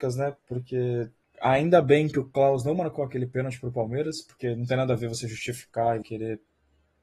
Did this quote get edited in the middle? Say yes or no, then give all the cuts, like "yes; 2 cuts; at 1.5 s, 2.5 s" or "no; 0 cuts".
yes; 2 cuts; at 1.2 s, 6.0 s